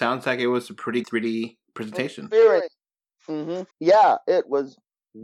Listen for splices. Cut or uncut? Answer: cut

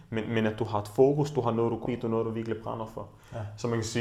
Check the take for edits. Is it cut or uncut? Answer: cut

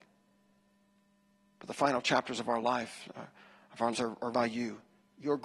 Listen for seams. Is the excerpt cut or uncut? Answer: cut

